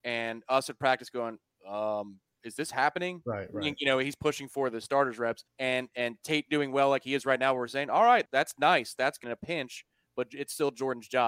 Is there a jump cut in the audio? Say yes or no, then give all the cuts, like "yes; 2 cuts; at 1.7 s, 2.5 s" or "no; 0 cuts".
yes; 3 cuts; at 5.5 s, 8.3 s, 9.2 s